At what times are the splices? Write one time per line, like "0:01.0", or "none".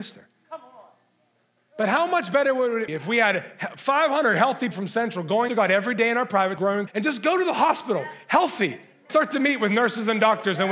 0:02.9
0:04.7
0:05.5
0:06.6
0:06.9
0:09.1